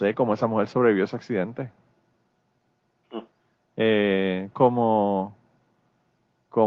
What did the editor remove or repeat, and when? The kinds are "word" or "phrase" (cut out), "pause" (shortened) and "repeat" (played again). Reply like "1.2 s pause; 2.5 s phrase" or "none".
4.5 s word